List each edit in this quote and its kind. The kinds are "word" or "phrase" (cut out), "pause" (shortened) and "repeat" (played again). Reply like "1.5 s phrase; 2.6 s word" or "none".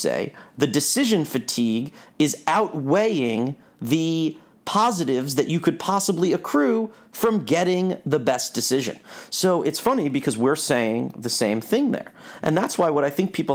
none